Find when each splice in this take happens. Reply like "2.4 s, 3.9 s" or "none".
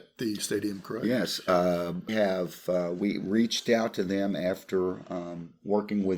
2.1 s

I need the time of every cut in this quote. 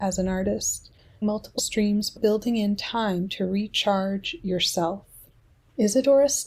1.2 s, 1.6 s, 2.2 s

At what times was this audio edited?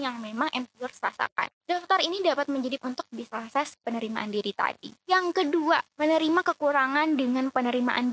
1.6 s, 2.8 s, 3.3 s, 5.0 s, 5.9 s

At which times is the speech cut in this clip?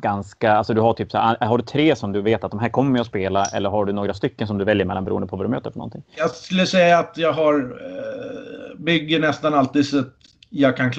none

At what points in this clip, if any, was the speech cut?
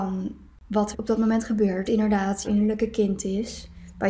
0.9 s, 1.9 s, 2.4 s

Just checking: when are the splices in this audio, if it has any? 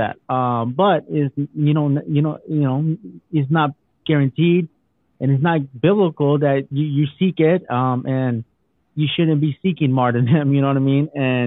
none

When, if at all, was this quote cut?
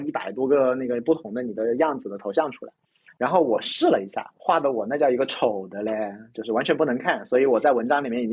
none

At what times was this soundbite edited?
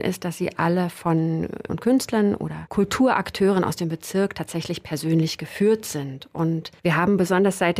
1.7 s

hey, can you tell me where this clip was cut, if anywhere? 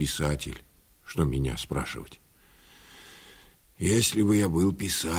none

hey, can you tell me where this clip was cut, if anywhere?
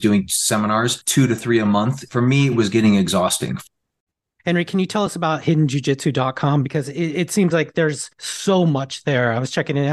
none

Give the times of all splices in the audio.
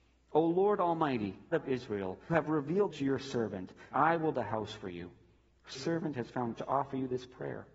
1.5 s, 2.3 s, 2.9 s, 3.9 s, 4.3 s, 5.7 s, 6.6 s

